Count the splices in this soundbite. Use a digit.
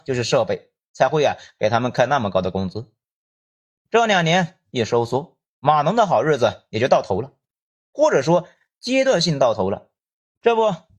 0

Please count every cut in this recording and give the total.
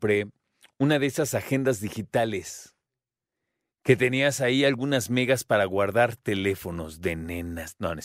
0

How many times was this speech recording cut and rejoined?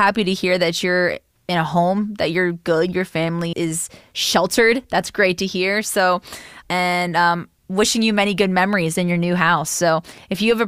2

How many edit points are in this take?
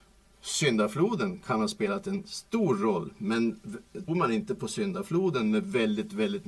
1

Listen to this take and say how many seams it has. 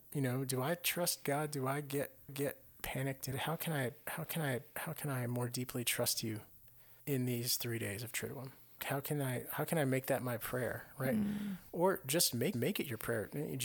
6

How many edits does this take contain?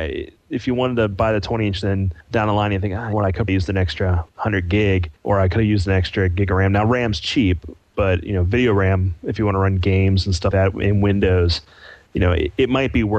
6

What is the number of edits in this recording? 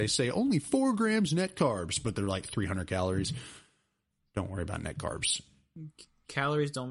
0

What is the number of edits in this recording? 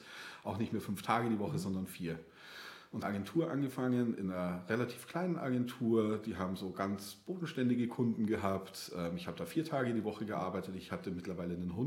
1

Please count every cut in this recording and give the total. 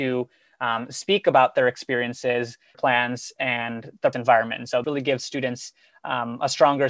3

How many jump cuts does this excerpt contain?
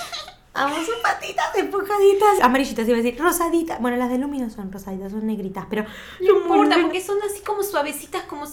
1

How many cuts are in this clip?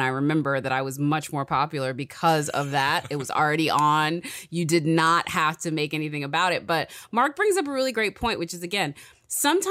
0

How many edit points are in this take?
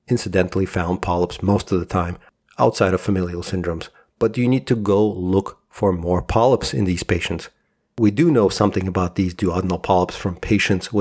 0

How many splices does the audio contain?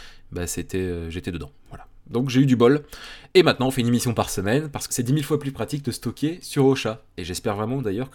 2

